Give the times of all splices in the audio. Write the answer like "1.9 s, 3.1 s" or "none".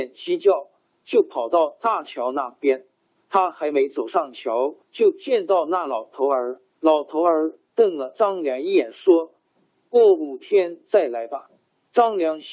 4.8 s, 6.7 s